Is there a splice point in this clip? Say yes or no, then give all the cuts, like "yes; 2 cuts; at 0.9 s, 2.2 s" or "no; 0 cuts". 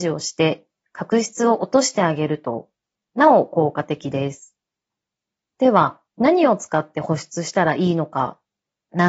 yes; 1 cut; at 6.1 s